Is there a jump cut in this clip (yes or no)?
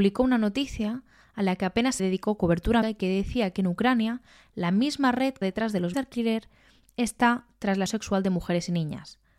yes